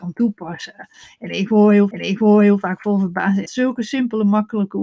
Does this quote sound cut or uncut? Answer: cut